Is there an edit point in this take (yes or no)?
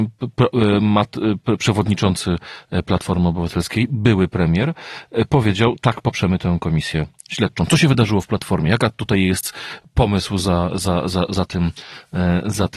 yes